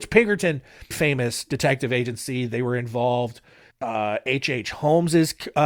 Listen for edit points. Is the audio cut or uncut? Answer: cut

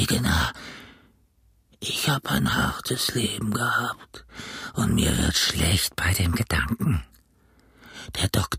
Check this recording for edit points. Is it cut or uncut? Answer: uncut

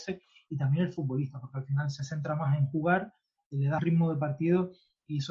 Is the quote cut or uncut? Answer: cut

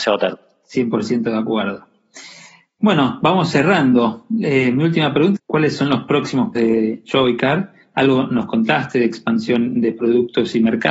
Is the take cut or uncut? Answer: cut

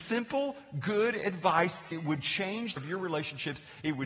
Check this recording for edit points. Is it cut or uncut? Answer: cut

